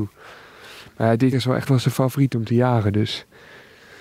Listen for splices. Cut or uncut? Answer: cut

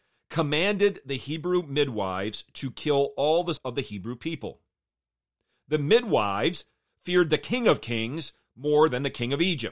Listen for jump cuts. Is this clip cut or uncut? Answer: cut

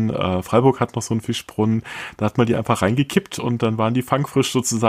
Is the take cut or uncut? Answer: uncut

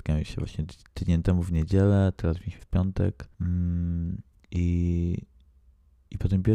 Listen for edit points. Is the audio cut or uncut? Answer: cut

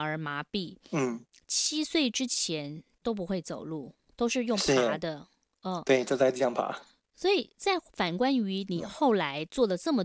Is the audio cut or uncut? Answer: uncut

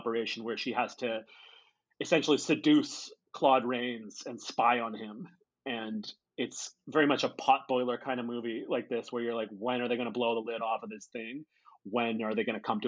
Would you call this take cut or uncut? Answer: uncut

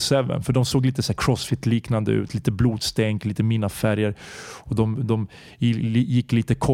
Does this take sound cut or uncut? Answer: uncut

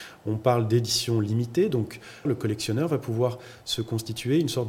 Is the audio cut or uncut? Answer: cut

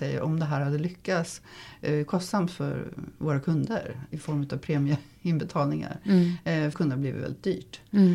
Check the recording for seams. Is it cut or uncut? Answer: cut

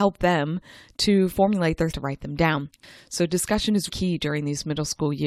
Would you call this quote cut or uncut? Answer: cut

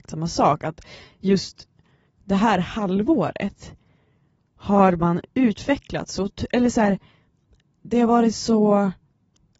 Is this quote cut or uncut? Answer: uncut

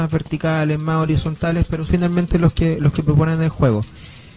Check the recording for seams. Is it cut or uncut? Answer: cut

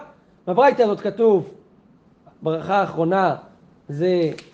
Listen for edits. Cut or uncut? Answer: uncut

